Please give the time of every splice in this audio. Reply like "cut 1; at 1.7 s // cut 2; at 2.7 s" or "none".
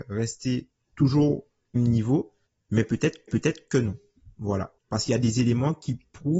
cut 1; at 1.8 s // cut 2; at 3.3 s // cut 3; at 4.8 s